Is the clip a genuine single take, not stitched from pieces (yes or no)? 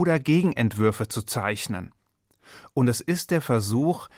yes